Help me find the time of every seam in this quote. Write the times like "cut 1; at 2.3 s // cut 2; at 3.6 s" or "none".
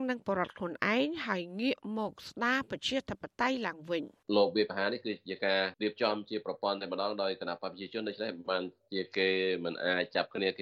cut 1; at 4.2 s